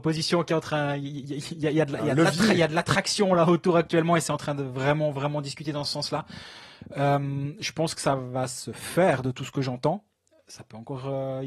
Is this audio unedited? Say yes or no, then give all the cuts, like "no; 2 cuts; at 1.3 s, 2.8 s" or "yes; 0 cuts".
yes; 0 cuts